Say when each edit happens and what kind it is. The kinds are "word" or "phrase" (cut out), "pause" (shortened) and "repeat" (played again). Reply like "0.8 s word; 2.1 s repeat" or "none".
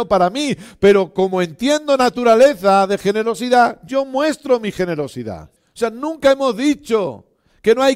5.6 s pause